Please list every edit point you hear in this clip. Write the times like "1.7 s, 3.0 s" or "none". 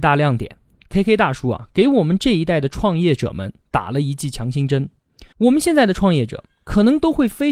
5.3 s